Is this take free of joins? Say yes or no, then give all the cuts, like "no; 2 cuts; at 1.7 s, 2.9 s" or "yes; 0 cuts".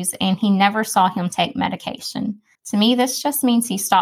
no; 1 cut; at 2.5 s